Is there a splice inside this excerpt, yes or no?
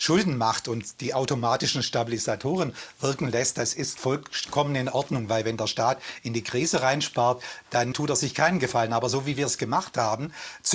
yes